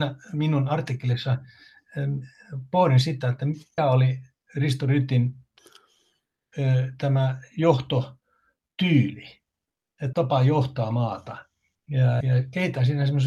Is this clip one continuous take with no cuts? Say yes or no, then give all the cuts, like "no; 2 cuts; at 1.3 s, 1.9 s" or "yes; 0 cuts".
no; 3 cuts; at 3.8 s, 10.1 s, 12.2 s